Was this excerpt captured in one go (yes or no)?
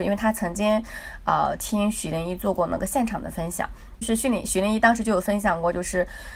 yes